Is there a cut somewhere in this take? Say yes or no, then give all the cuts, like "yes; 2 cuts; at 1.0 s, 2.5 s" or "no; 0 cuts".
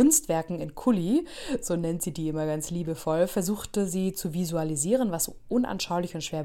no; 0 cuts